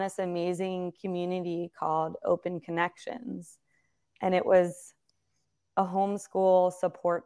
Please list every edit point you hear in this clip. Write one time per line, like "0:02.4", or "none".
none